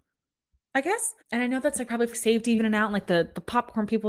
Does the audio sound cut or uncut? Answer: cut